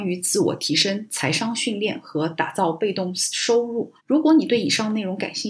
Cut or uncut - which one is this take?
cut